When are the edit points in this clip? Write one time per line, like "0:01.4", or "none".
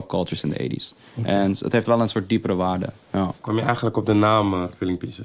0:01.1
0:01.8
0:03.4